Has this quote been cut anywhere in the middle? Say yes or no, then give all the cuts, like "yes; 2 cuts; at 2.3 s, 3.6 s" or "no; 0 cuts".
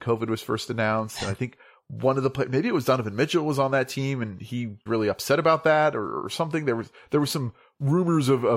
yes; 1 cut; at 4.9 s